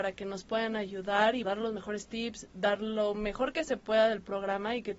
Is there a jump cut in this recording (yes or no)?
yes